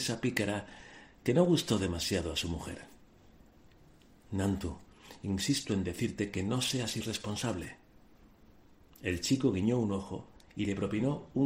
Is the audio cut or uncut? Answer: uncut